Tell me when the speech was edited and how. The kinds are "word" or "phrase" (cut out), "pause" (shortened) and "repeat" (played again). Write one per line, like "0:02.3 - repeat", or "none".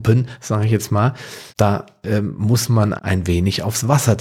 0:01.5 - pause
0:03.0 - word